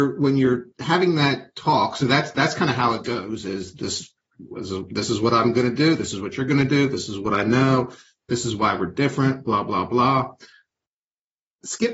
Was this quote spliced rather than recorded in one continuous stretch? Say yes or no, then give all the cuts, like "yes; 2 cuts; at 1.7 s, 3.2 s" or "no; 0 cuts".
no; 0 cuts